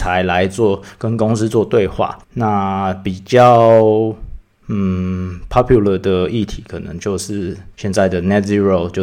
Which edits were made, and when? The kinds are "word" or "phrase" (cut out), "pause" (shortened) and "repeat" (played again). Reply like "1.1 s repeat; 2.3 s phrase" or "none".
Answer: 2.2 s pause; 4.5 s pause; 7.7 s pause